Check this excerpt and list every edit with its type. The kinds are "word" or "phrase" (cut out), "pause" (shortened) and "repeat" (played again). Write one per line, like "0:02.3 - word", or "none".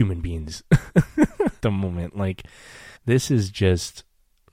0:01.6 - word
0:03.0 - pause

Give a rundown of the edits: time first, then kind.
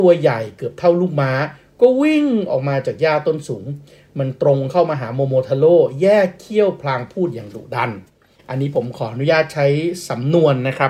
none

